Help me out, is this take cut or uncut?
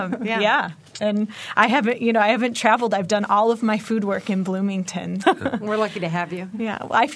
cut